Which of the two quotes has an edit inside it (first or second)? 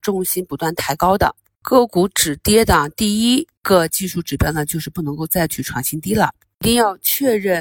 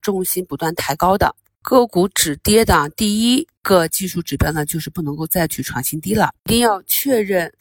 second